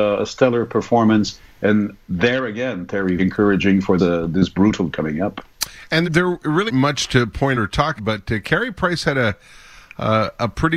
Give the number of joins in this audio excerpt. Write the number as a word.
seven